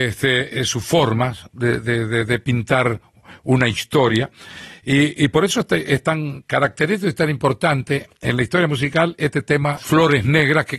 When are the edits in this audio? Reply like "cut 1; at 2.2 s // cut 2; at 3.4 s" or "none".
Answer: none